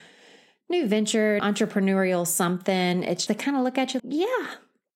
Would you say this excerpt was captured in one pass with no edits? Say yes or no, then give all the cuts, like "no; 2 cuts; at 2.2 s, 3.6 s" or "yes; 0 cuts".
no; 3 cuts; at 1.4 s, 3.3 s, 4.0 s